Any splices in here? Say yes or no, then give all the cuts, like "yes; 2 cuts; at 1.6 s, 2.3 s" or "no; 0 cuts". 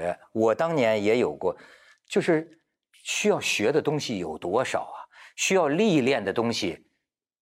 no; 0 cuts